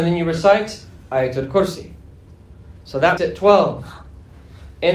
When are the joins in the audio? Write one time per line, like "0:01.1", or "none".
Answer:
0:03.2